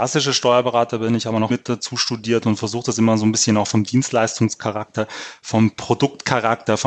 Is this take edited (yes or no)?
yes